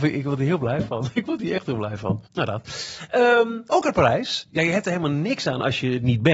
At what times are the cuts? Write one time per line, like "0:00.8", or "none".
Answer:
0:02.3
0:03.7